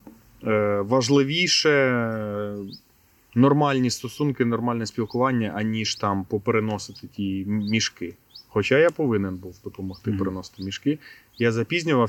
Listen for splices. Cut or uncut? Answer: uncut